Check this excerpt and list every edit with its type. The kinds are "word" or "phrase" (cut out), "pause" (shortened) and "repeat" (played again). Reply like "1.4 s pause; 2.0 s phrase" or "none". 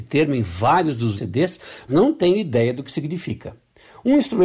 1.2 s word; 1.9 s word